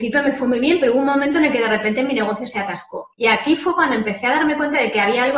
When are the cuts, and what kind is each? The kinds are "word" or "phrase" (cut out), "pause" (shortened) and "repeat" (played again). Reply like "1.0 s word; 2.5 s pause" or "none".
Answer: 3.1 s pause